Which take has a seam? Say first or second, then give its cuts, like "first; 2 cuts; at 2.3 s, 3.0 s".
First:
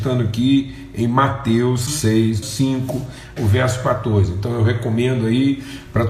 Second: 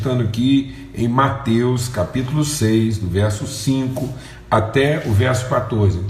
first; 3 cuts; at 1.9 s, 2.4 s, 3.4 s